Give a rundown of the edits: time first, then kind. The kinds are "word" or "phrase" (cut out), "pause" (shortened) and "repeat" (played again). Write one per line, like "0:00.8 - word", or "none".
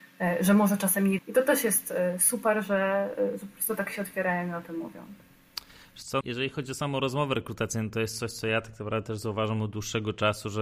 0:01.2 - word
0:06.2 - word